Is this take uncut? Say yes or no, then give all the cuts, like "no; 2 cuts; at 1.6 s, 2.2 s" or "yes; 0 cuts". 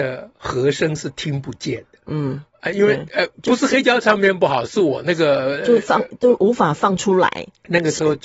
no; 1 cut; at 3.3 s